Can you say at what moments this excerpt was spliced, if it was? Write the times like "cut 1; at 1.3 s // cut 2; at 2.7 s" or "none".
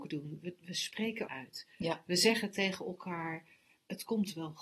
cut 1; at 1.3 s